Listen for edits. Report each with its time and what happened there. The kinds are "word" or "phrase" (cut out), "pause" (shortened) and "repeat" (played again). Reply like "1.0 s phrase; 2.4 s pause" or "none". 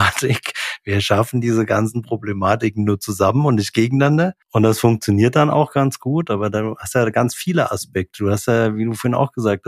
4.4 s pause